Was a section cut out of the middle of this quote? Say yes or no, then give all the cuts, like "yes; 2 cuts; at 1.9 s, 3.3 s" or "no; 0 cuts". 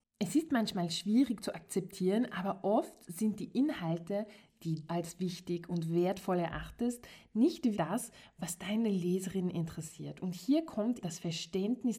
yes; 3 cuts; at 4.9 s, 7.7 s, 11.0 s